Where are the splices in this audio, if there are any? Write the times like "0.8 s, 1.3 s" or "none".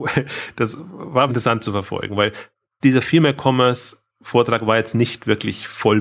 1.3 s